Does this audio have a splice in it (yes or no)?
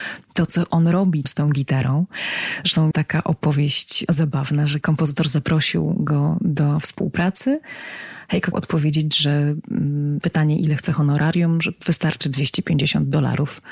yes